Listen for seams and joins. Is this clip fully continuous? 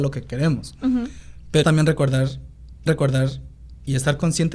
no; 2 cuts; at 1.6 s, 2.9 s

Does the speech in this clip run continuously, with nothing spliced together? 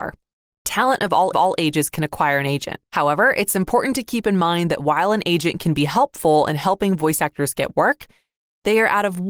no; 2 cuts; at 1.3 s, 2.8 s

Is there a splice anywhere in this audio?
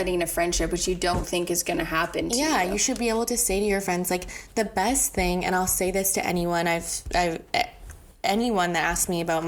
yes; 1 cut; at 1.2 s

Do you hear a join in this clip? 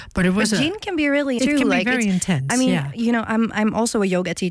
yes; 1 cut; at 1.4 s

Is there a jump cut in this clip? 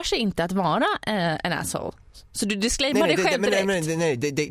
no; 0 cuts

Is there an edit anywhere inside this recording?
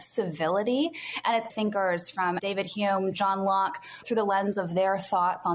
yes; 4 cuts; at 1.5 s, 2.4 s, 3.1 s, 4.0 s

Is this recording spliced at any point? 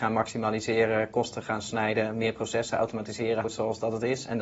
yes; 1 cut; at 3.4 s

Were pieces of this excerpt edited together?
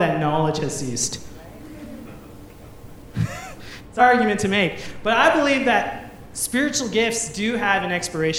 yes; 1 cut; at 4.0 s

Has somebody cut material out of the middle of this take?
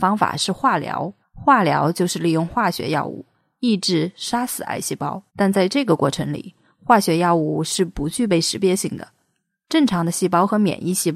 yes; 2 cuts; at 1.2 s, 5.3 s

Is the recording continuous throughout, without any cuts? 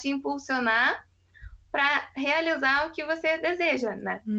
yes; 0 cuts

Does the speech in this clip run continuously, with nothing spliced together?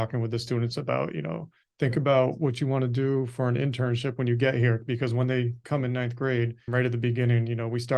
no; 1 cut; at 6.7 s

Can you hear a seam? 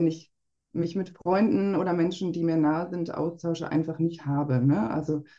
no; 0 cuts

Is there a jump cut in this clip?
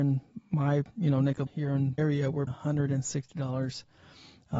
yes; 3 cuts; at 1.5 s, 2.0 s, 2.5 s

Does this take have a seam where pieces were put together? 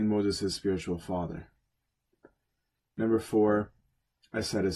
no; 0 cuts

